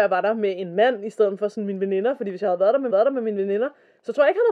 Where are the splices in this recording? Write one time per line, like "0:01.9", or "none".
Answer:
0:02.9